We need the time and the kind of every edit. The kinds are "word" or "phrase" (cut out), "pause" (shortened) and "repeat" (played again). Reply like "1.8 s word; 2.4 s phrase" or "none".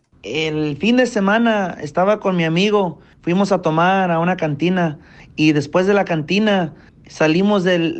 none